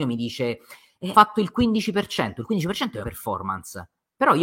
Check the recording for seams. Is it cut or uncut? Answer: cut